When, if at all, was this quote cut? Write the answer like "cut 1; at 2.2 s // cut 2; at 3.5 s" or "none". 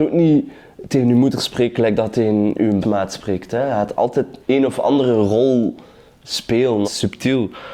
cut 1; at 2.8 s // cut 2; at 4.4 s // cut 3; at 6.8 s